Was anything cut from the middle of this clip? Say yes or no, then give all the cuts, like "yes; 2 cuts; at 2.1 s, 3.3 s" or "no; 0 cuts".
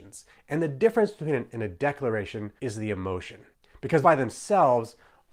yes; 4 cuts; at 1.5 s, 2.6 s, 3.5 s, 4.0 s